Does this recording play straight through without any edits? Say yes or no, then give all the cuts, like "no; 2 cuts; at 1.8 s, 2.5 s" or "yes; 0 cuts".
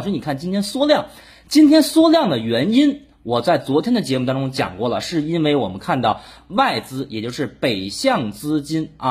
yes; 0 cuts